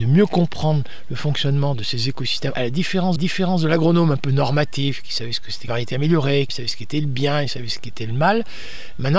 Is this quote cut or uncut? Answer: cut